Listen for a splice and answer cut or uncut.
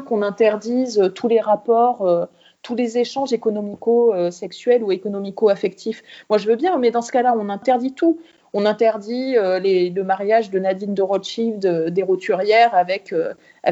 uncut